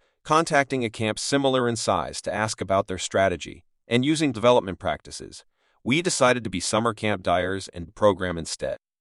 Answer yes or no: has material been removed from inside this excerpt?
yes